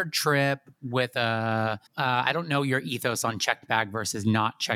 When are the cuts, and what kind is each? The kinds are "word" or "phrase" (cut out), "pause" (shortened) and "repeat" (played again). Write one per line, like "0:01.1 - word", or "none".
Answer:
0:01.9 - pause